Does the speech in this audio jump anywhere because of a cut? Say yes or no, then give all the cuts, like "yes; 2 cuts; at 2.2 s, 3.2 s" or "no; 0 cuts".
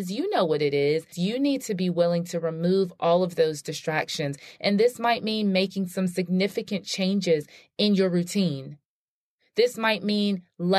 no; 0 cuts